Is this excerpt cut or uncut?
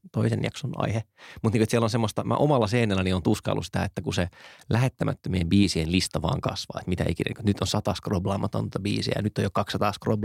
uncut